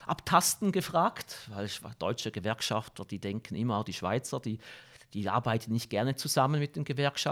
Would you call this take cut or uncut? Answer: uncut